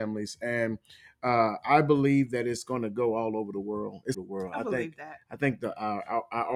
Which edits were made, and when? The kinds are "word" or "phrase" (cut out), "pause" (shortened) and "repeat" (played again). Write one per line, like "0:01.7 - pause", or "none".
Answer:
0:04.1 - phrase

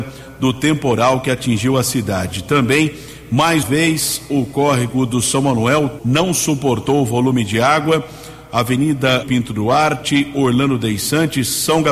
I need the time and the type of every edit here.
0:03.6 - word
0:06.0 - word
0:09.2 - word

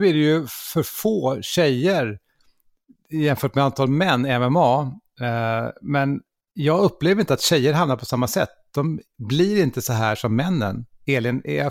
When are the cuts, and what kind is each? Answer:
none

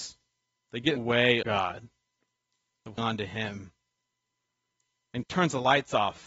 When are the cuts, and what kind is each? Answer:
0:01.0 - word
0:01.4 - word
0:03.0 - word
0:05.2 - word

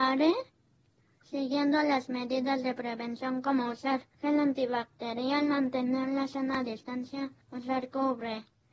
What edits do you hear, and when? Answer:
0:04.1 - pause
0:07.4 - pause

